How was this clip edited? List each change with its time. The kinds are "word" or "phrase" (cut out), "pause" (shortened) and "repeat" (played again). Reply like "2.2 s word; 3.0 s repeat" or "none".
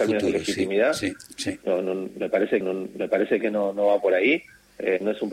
2.6 s repeat